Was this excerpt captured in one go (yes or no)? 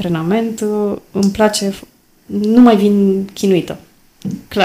yes